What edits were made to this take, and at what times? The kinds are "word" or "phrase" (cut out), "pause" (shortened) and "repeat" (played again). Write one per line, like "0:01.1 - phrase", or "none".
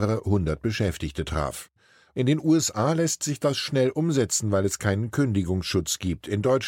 none